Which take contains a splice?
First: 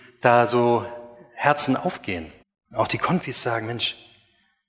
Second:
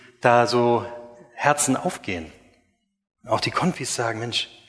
first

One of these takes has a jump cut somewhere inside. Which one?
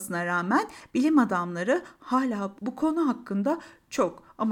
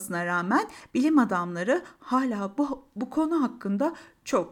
first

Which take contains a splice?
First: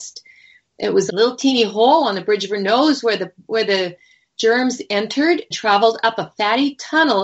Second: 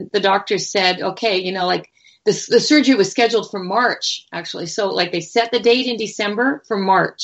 first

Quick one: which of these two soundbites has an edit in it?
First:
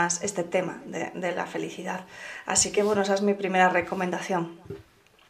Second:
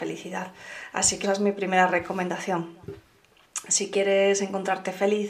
second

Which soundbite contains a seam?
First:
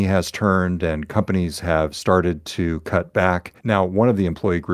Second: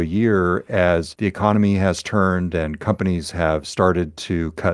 first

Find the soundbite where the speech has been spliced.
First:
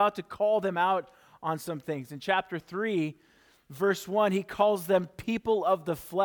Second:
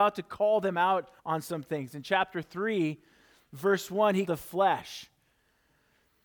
second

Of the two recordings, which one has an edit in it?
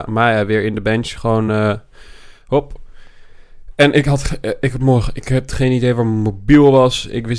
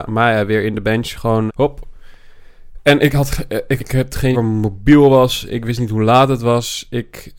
second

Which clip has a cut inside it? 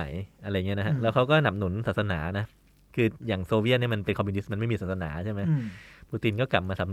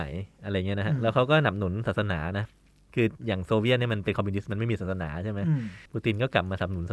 second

